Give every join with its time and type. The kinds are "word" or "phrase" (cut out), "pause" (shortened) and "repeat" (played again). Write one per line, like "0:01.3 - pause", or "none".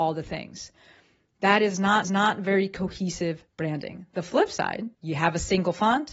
0:02.0 - repeat
0:03.5 - pause
0:04.9 - pause